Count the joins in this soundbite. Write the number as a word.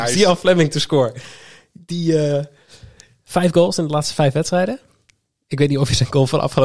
zero